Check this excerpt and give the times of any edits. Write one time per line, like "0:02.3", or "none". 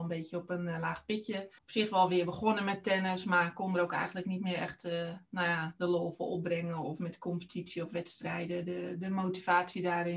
0:01.6
0:05.3